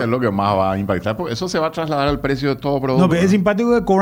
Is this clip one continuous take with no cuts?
no; 1 cut; at 3.1 s

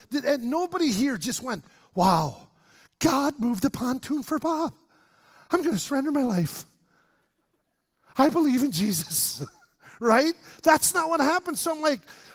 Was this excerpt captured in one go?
yes; 0 cuts

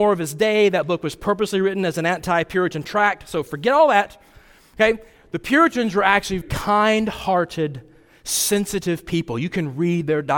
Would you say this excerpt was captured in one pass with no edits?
no; 1 cut; at 6.4 s

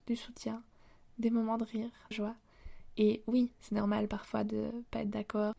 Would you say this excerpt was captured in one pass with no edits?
no; 1 cut; at 2.1 s

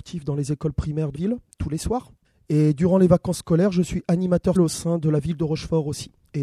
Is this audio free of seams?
no; 3 cuts; at 1.1 s, 2.2 s, 4.6 s

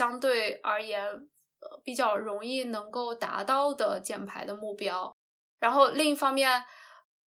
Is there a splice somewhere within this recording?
no; 0 cuts

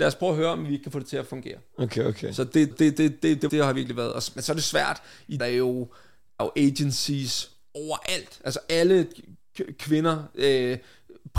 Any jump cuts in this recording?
yes; 4 cuts; at 2.7 s, 3.5 s, 5.4 s, 6.4 s

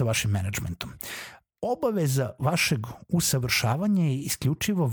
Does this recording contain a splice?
no; 0 cuts

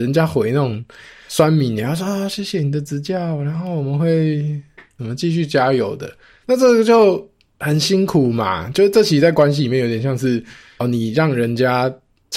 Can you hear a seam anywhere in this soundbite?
no; 0 cuts

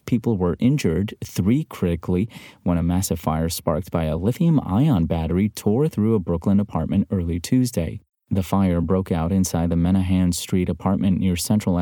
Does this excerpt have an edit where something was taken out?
no; 0 cuts

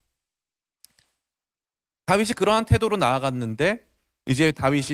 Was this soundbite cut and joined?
no; 0 cuts

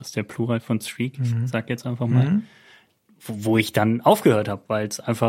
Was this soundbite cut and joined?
no; 0 cuts

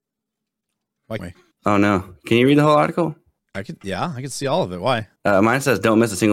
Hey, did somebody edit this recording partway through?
yes; 4 cuts; at 1.2 s, 1.5 s, 3.4 s, 5.2 s

